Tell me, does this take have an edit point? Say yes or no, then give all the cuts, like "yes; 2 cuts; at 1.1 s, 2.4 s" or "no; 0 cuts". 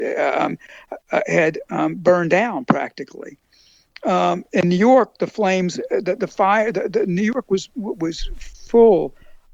no; 0 cuts